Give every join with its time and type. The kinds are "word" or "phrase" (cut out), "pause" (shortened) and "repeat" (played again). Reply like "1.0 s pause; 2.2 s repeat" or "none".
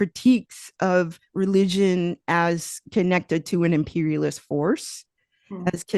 1.3 s pause